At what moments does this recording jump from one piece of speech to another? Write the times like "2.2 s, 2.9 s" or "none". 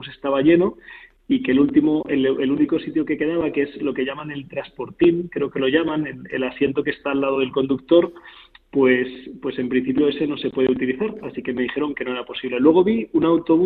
none